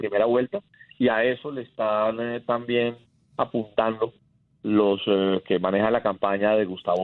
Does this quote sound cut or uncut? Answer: uncut